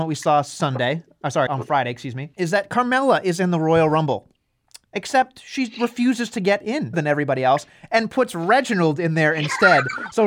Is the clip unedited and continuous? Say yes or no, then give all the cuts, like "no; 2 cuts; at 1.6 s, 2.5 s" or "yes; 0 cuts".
no; 4 cuts; at 1.5 s, 2.3 s, 4.9 s, 6.9 s